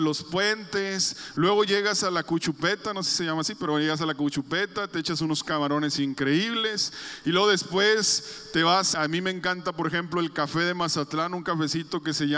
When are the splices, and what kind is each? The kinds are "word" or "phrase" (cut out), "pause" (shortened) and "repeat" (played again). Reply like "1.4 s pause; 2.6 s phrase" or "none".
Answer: 8.9 s word